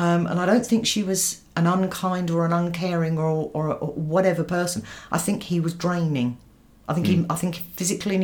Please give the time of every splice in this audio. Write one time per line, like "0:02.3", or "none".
none